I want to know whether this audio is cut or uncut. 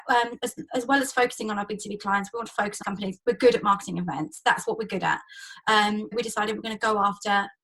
cut